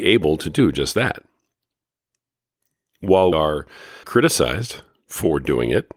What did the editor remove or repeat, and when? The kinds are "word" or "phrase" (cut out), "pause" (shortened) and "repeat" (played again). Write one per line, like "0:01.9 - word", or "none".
0:03.3 - word
0:04.0 - word